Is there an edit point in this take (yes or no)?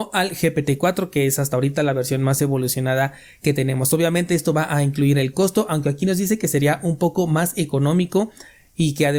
no